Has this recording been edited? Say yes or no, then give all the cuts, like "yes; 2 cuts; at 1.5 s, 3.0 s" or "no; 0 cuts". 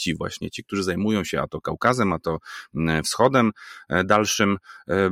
no; 0 cuts